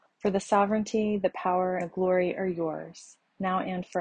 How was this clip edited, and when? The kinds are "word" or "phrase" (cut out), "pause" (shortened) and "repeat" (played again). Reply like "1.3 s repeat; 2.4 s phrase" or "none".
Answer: 1.8 s word

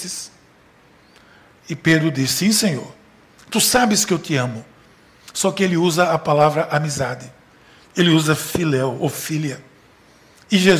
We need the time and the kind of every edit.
none

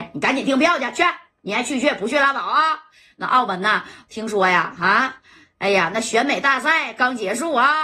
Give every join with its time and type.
none

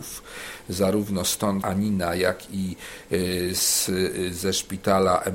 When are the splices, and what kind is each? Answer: 1.6 s word

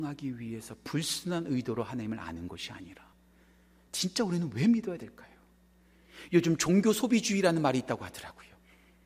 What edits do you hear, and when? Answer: none

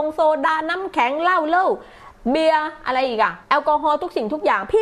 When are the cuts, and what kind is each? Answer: 3.4 s pause

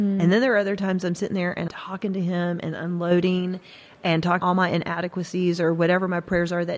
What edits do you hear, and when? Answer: 1.7 s word; 4.4 s word

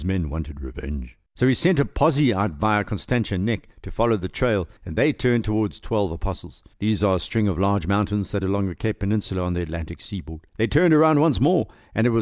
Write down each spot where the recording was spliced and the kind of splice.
1.3 s pause; 3.7 s pause; 4.8 s pause; 6.7 s pause; 8.4 s word; 10.5 s pause

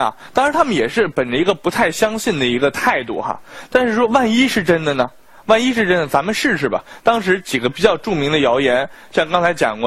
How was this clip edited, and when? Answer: none

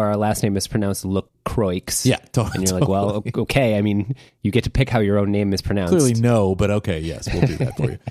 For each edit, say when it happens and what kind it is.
none

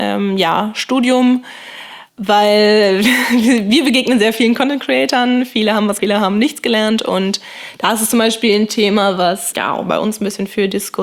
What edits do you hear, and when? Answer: 2.1 s pause; 6.0 s word; 9.5 s word

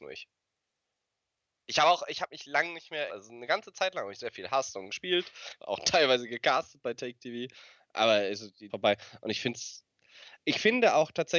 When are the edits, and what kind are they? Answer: 3.1 s phrase; 5.6 s phrase; 8.7 s phrase

